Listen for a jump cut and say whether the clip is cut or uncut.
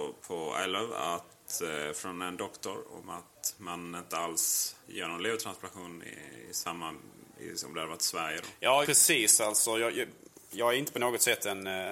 cut